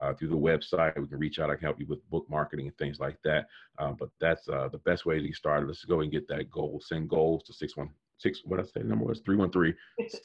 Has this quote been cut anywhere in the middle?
no; 0 cuts

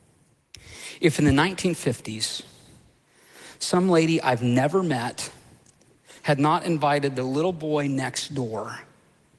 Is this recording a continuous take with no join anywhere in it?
no; 1 cut; at 6.2 s

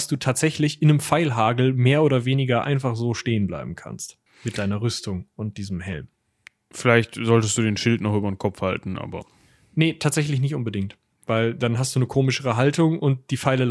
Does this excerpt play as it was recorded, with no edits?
yes; 0 cuts

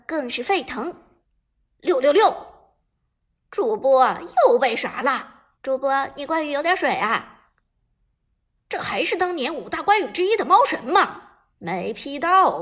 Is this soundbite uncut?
no; 3 cuts; at 1.2 s, 5.5 s, 11.5 s

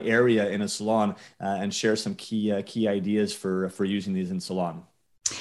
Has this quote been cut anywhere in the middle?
no; 0 cuts

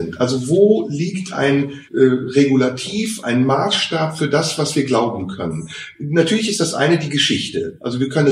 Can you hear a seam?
yes; 1 cut; at 1.9 s

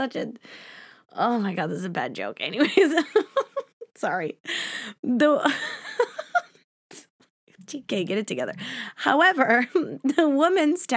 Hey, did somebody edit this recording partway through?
no; 0 cuts

